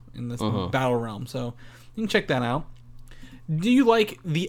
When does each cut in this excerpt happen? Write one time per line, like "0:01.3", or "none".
none